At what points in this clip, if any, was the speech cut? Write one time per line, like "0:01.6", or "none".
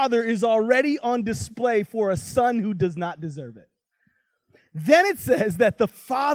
none